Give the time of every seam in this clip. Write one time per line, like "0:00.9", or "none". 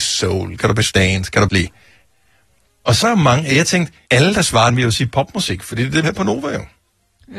0:00.9
0:01.5
0:03.0
0:04.1
0:04.7
0:06.0